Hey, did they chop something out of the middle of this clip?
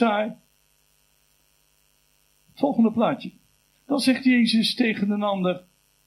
yes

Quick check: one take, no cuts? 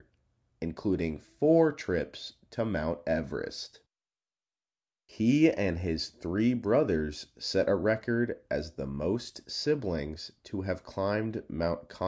yes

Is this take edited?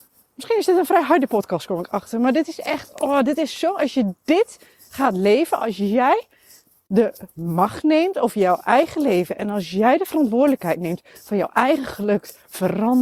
no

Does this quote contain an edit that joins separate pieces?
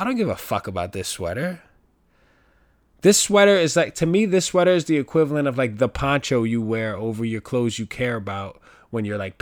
no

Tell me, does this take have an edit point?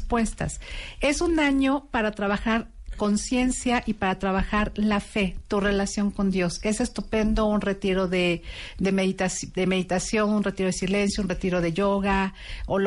no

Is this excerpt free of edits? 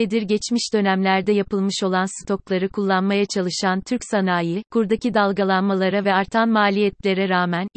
yes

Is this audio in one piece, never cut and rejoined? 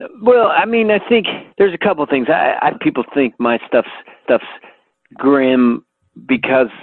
no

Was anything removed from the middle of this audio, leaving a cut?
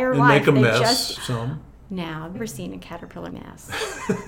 yes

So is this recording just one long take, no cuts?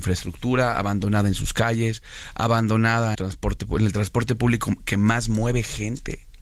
no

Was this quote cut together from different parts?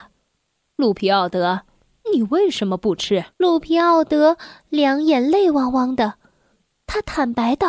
yes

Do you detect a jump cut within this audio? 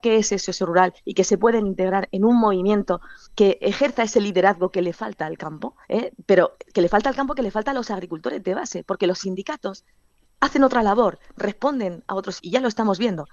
yes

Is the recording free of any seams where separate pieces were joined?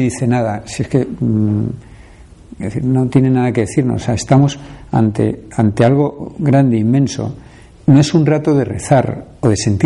yes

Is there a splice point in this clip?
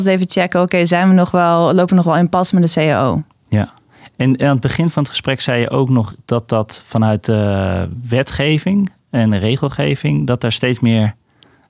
no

